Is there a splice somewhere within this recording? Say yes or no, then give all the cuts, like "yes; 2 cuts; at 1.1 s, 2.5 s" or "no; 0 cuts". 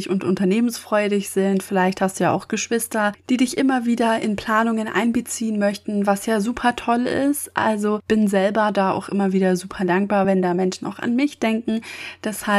no; 0 cuts